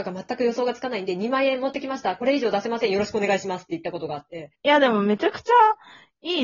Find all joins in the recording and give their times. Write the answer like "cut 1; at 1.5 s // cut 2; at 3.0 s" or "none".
cut 1; at 4.5 s